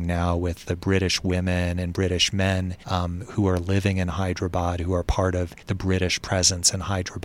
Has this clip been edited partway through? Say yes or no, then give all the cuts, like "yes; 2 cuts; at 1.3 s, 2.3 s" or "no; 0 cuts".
yes; 2 cuts; at 2.8 s, 5.6 s